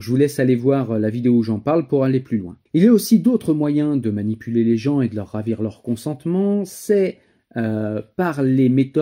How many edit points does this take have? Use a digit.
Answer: 1